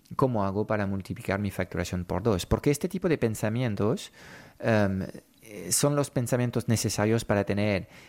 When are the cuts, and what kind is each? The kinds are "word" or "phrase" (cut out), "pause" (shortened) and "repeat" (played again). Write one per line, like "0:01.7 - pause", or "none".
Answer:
none

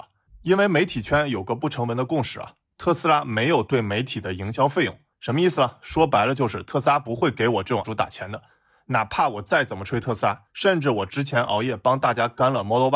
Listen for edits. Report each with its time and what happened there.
0:07.8 - word
0:10.5 - pause

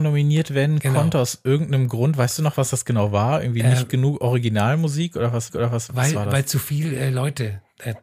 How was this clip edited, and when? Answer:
0:05.5 - repeat

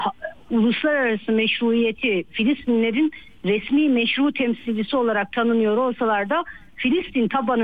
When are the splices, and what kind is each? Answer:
none

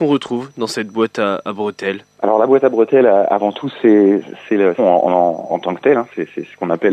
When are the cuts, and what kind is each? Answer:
0:02.1 - pause
0:04.8 - word
0:05.5 - word

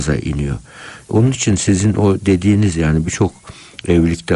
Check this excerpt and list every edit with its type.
none

